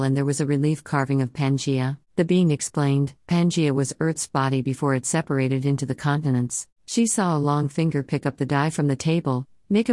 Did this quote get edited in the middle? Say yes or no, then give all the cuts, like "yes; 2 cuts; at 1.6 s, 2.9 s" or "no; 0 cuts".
yes; 2 cuts; at 2.0 s, 6.7 s